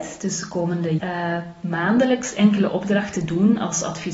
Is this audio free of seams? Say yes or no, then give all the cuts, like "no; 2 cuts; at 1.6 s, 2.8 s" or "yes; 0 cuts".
no; 1 cut; at 1.0 s